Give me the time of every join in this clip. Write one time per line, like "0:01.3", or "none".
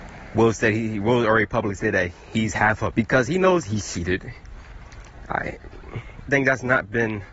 0:02.9
0:03.6
0:06.3